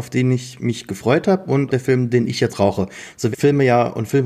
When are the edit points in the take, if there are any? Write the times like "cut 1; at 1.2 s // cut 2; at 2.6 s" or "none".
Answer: cut 1; at 1.7 s // cut 2; at 2.5 s // cut 3; at 3.3 s